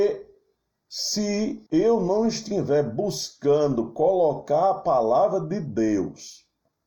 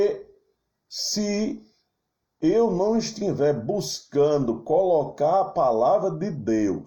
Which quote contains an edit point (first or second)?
first